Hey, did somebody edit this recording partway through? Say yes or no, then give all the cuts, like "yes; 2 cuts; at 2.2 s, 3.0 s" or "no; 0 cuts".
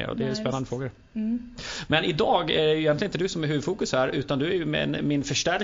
no; 0 cuts